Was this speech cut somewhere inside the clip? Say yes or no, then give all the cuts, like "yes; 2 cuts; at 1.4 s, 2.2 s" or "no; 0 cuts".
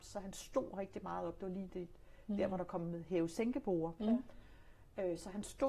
no; 0 cuts